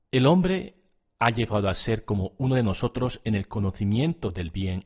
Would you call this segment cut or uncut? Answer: uncut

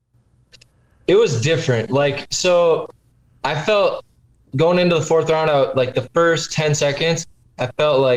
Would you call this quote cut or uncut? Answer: uncut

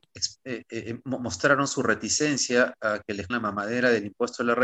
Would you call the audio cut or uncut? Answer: cut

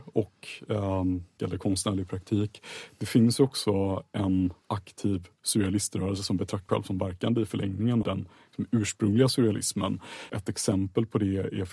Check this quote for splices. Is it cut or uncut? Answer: cut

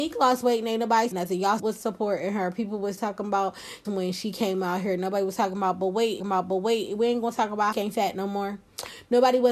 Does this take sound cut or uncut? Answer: cut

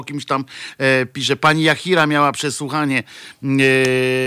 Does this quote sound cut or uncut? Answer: uncut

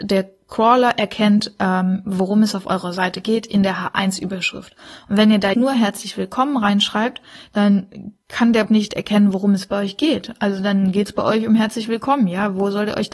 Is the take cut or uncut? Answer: cut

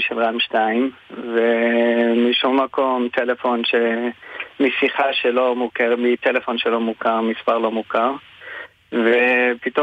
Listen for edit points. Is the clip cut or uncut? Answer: uncut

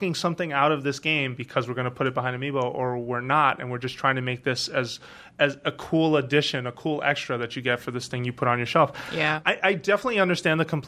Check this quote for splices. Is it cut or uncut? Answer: uncut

